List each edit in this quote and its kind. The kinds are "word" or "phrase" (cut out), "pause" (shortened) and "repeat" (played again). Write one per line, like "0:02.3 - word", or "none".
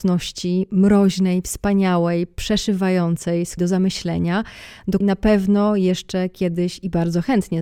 0:03.6 - word
0:05.0 - word